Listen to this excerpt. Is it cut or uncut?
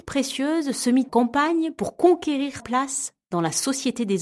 cut